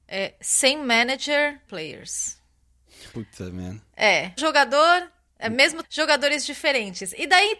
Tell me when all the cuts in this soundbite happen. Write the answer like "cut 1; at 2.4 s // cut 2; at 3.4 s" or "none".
cut 1; at 1.7 s // cut 2; at 3.1 s // cut 3; at 4.4 s // cut 4; at 5.8 s